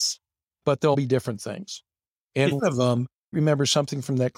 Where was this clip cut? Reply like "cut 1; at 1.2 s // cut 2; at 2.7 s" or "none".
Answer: cut 1; at 0.9 s // cut 2; at 2.6 s // cut 3; at 3.3 s